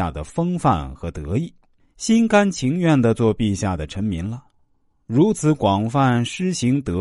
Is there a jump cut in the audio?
yes; 1 cut; at 1.8 s

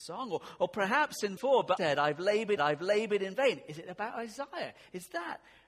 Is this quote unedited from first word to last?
no; 3 cuts; at 1.4 s, 1.8 s, 2.6 s

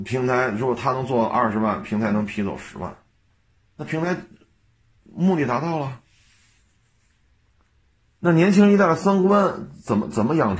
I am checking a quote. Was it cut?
no; 0 cuts

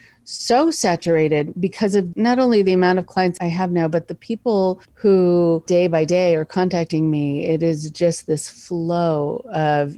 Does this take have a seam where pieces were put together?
yes; 1 cut; at 4.8 s

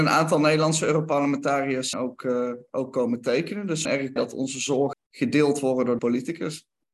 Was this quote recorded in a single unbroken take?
no; 5 cuts; at 1.9 s, 3.8 s, 4.2 s, 4.9 s, 6.0 s

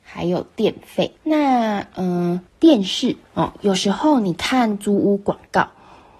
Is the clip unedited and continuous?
no; 3 cuts; at 1.2 s, 2.5 s, 3.2 s

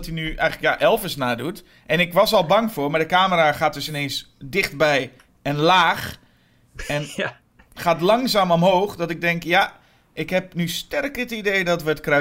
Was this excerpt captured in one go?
yes; 0 cuts

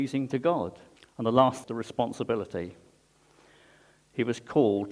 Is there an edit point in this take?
yes; 2 cuts; at 1.0 s, 1.6 s

